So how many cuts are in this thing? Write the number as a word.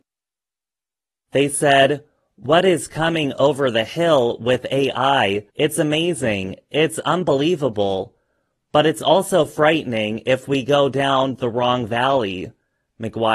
one